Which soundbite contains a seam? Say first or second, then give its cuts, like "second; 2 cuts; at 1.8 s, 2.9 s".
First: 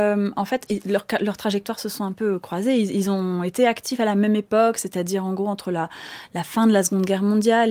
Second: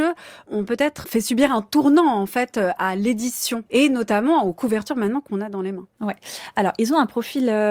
second; 2 cuts; at 1.0 s, 3.7 s